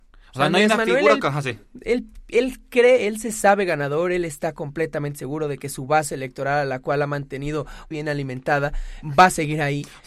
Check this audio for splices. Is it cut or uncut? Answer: cut